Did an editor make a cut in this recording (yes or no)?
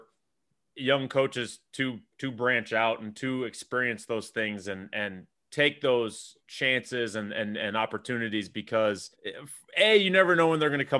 yes